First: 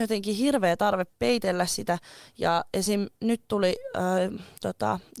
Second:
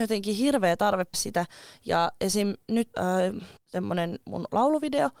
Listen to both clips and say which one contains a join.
second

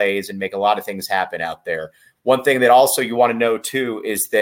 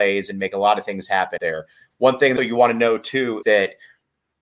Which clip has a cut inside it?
second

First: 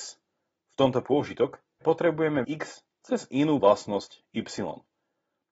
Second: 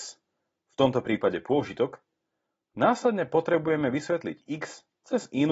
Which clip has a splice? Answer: first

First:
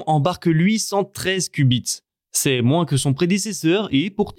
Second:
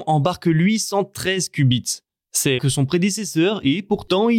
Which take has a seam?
second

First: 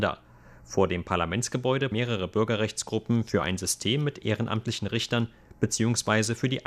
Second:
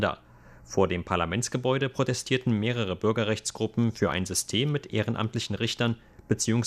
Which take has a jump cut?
first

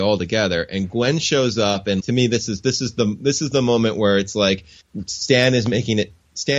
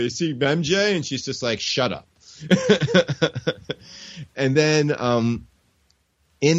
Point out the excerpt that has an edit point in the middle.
first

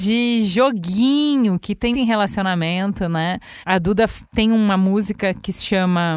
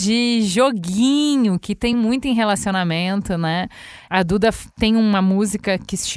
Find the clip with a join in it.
first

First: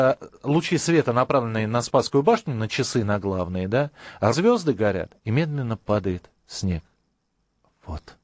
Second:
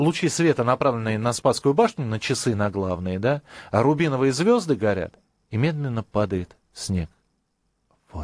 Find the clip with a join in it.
first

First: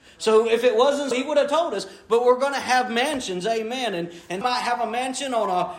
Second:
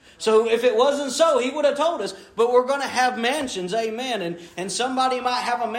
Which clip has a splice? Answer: first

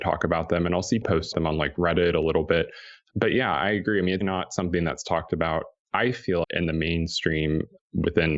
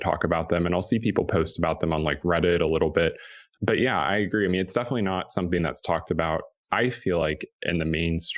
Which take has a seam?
first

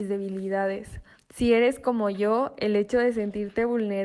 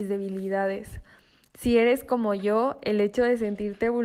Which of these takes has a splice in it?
first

